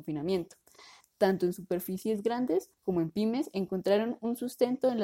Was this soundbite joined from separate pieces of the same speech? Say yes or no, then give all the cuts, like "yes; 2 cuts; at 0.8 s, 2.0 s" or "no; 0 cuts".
yes; 1 cut; at 2.7 s